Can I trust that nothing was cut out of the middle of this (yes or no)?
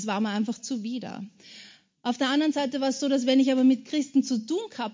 yes